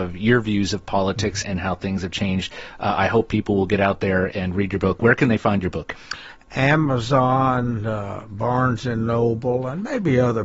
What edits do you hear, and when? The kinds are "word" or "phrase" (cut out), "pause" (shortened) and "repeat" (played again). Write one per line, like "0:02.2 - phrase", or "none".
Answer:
0:01.4 - word
0:04.3 - word